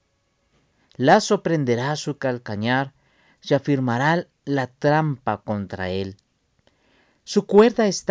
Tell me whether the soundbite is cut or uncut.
uncut